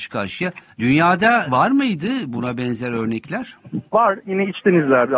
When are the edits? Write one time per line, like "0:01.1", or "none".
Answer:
0:01.5
0:03.9